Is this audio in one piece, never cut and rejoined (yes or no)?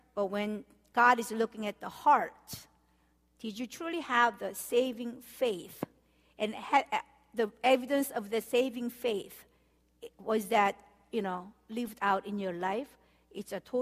yes